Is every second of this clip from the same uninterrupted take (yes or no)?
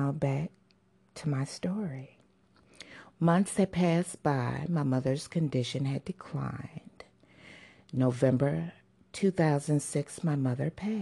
yes